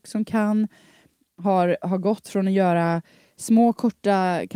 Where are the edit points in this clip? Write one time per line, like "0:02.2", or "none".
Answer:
none